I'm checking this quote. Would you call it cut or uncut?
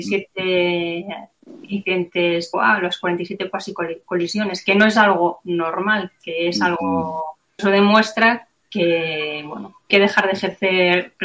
cut